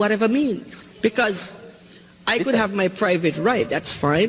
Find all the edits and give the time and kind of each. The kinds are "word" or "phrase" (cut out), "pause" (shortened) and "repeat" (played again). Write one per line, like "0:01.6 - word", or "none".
0:00.9 - pause

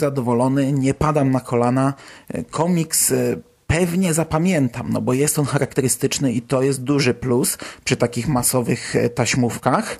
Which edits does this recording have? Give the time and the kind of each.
none

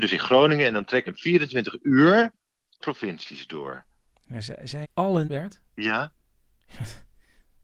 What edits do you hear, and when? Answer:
0:01.1 - word
0:02.8 - word
0:04.8 - word
0:05.2 - word

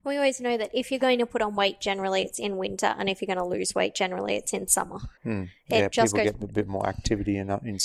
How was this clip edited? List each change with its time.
0:05.2 - pause

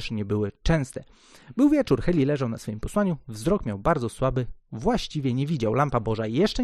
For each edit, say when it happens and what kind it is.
none

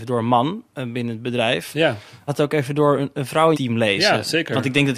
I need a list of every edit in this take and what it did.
0:02.3 - word
0:03.5 - word

